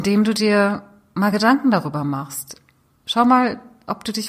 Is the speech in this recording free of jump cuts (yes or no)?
yes